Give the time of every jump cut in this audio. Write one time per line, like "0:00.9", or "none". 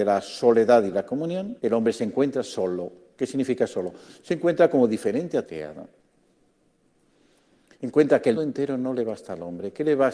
0:01.6
0:05.4
0:08.3